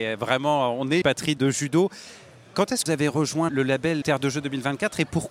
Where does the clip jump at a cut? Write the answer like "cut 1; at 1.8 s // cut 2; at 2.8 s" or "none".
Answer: cut 1; at 1.0 s // cut 2; at 1.4 s // cut 3; at 2.9 s // cut 4; at 3.5 s // cut 5; at 4.0 s